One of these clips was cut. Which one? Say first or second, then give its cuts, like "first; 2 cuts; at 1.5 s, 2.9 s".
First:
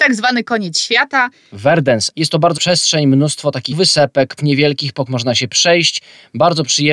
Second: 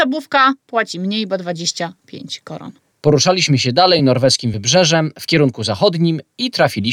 first; 5 cuts; at 2.1 s, 2.6 s, 3.7 s, 4.4 s, 5.1 s